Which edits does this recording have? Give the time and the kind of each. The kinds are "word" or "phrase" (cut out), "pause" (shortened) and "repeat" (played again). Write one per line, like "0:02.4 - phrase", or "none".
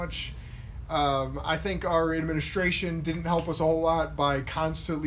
none